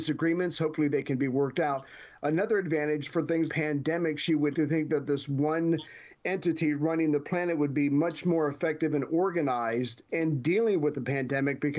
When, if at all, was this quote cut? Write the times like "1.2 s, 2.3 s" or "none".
3.0 s, 3.5 s, 4.5 s